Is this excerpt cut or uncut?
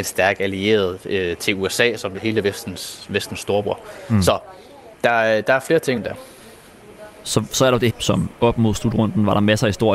cut